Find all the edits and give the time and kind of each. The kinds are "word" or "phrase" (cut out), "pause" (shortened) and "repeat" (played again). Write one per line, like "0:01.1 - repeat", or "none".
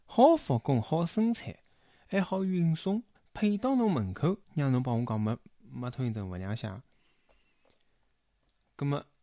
0:03.2 - pause
0:04.4 - pause